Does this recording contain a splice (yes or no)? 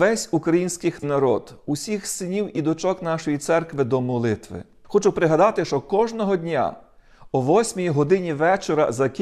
no